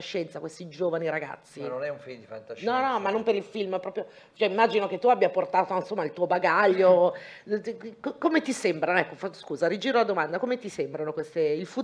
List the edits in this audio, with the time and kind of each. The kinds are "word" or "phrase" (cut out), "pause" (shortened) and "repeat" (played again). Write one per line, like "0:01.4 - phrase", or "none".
none